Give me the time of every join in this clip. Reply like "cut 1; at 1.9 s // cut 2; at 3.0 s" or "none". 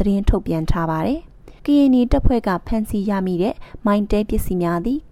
cut 1; at 1.6 s